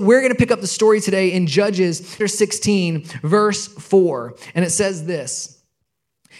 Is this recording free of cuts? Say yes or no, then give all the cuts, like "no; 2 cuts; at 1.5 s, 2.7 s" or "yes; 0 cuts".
no; 1 cut; at 2.2 s